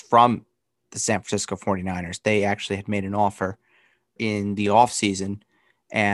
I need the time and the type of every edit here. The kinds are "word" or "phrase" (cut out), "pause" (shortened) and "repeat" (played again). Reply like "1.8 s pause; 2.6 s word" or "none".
4.2 s word